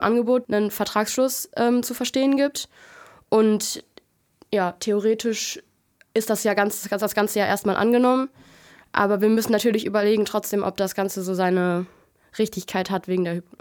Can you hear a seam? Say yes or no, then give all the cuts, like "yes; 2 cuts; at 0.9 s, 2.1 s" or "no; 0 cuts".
no; 0 cuts